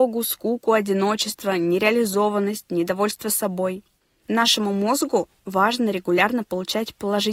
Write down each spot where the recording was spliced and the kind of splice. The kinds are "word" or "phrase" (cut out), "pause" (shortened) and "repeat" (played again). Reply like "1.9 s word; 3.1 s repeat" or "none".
none